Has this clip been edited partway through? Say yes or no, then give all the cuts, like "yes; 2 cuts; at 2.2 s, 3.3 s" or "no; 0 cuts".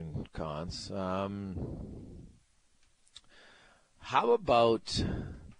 no; 0 cuts